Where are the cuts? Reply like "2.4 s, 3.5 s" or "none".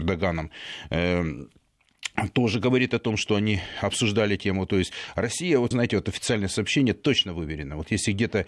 5.7 s